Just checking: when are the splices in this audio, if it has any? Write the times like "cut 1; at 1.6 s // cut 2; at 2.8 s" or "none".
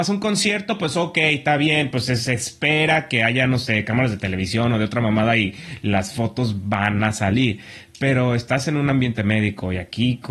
none